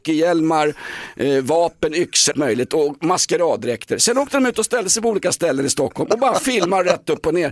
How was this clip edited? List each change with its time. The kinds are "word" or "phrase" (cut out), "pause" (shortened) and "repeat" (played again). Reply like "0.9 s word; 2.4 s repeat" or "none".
2.3 s word